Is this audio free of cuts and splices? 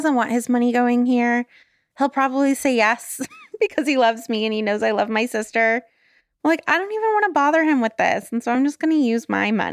yes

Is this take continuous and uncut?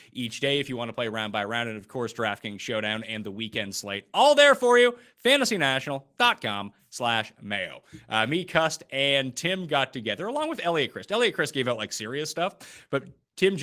yes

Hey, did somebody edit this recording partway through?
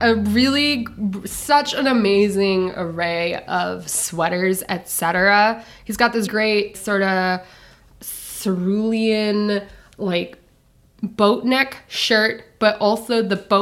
yes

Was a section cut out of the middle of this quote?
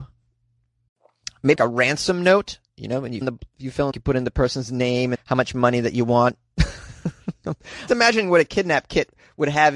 yes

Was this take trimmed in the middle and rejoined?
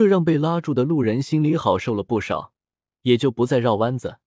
no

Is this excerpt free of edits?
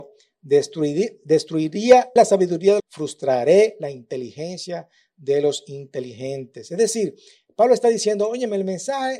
no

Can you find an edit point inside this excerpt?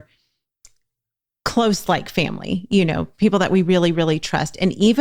no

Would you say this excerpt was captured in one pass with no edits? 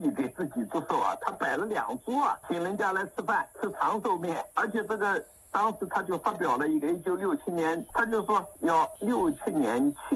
no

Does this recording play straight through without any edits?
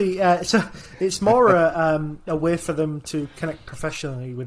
yes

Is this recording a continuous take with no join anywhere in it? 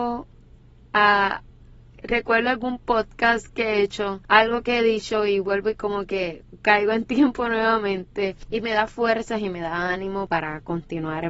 yes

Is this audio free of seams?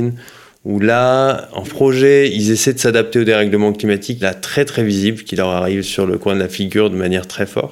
no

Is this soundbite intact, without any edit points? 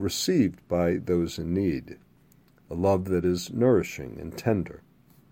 yes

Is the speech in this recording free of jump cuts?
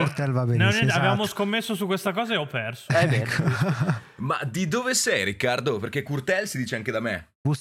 yes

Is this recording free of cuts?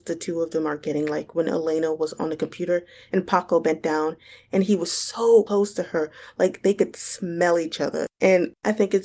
yes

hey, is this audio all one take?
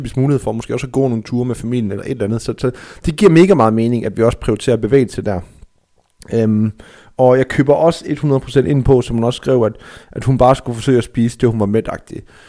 yes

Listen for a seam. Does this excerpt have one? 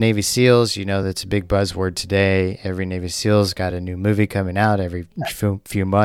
no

